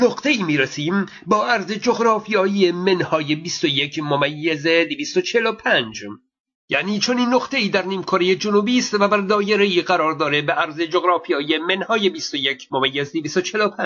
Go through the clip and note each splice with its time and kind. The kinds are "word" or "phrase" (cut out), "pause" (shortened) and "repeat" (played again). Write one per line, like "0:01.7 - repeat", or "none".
none